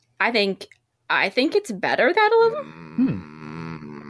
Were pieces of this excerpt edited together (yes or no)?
yes